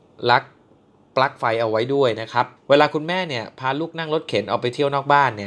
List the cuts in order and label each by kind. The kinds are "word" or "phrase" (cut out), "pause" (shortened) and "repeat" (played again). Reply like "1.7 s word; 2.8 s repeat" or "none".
2.6 s pause